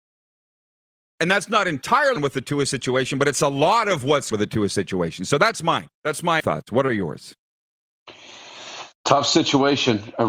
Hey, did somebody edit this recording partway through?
yes; 4 cuts; at 2.2 s, 4.3 s, 5.9 s, 6.4 s

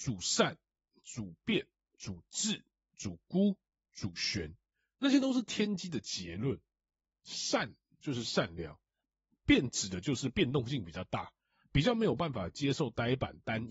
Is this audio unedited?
yes; 0 cuts

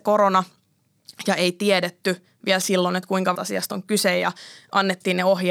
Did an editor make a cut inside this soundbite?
yes; 1 cut; at 3.3 s

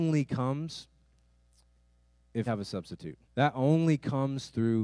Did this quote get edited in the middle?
yes; 2 cuts; at 2.5 s, 3.3 s

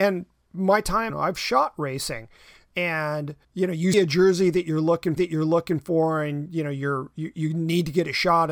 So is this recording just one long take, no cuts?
no; 4 cuts; at 1.1 s, 3.4 s, 3.9 s, 5.2 s

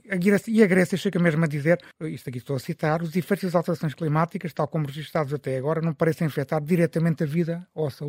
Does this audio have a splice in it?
yes; 1 cut; at 1.9 s

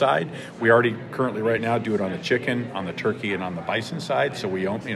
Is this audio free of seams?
yes; 0 cuts

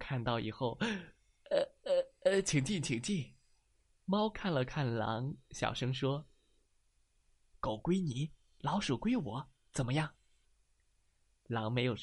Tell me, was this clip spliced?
no; 0 cuts

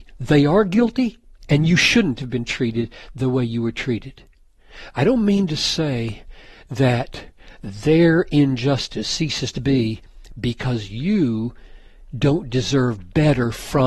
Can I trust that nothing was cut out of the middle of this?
yes; 0 cuts

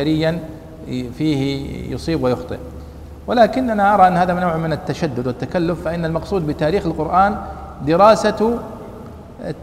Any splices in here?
no; 0 cuts

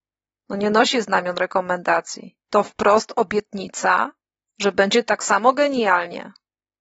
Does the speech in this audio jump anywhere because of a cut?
no; 0 cuts

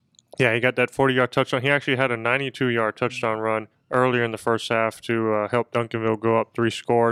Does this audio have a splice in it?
yes; 1 cut; at 3.7 s

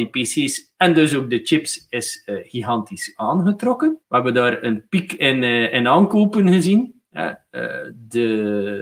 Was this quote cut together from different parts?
yes; 1 cut; at 4.0 s

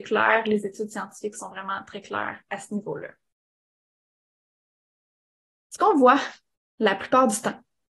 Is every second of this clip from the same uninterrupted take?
yes; 0 cuts

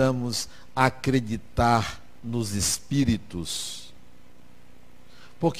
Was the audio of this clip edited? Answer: no; 0 cuts

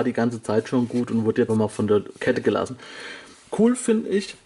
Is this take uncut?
no; 2 cuts; at 1.5 s, 3.3 s

